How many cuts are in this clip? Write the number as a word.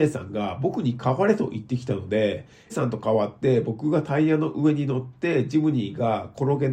one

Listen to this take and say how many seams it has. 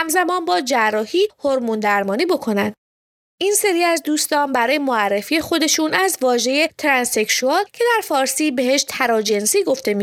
zero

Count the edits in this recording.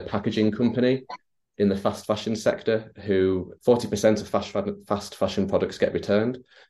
one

